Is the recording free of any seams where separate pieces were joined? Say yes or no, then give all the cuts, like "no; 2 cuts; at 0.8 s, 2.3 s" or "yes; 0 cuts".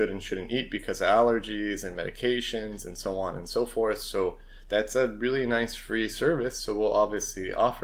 yes; 0 cuts